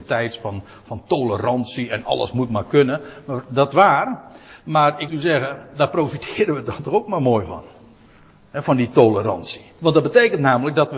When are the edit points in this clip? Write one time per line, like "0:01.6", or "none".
0:03.7
0:05.1